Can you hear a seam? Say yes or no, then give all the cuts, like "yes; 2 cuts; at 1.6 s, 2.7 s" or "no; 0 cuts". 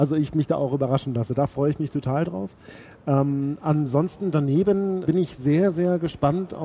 yes; 1 cut; at 5.0 s